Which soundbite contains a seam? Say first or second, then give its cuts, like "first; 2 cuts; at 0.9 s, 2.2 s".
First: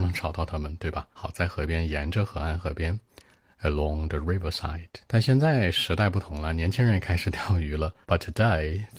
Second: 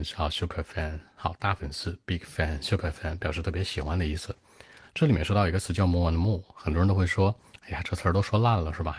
first; 3 cuts; at 1.1 s, 5.0 s, 8.0 s